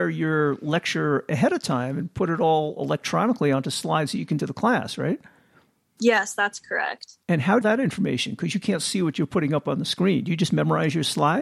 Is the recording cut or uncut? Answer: cut